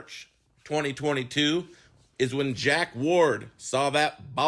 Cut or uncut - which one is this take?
uncut